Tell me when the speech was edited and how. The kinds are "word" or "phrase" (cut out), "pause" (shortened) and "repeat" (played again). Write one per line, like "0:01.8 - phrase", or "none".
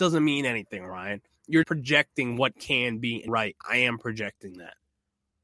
0:01.6 - word
0:02.5 - word
0:03.3 - word
0:03.6 - pause